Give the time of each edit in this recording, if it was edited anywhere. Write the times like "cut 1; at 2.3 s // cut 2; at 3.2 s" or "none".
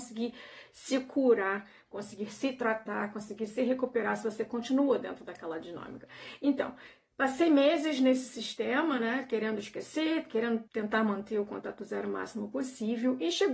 cut 1; at 10.7 s